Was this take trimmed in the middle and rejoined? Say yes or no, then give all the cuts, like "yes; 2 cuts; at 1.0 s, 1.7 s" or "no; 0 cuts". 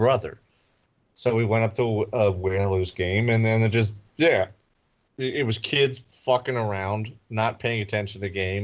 no; 0 cuts